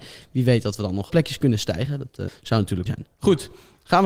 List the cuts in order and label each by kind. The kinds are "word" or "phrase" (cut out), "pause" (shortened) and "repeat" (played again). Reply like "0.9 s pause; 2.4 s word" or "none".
1.1 s word; 2.3 s word; 2.9 s word